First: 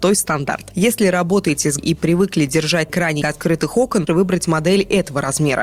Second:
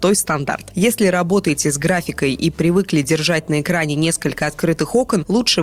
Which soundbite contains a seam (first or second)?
first